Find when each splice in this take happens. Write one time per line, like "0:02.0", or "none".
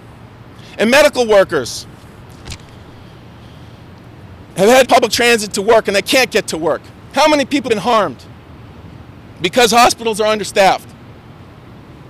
0:04.8
0:05.5
0:07.7